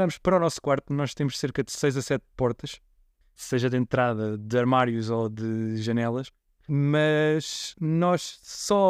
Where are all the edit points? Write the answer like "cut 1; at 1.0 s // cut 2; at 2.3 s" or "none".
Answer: none